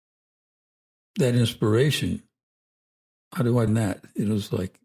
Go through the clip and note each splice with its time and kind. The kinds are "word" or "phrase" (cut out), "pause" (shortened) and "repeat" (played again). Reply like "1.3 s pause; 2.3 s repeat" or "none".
3.4 s phrase; 3.7 s word